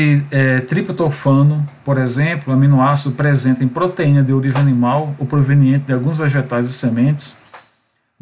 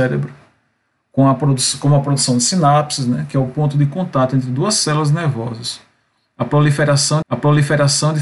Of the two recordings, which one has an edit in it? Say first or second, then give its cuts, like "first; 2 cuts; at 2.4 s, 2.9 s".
second; 1 cut; at 7.2 s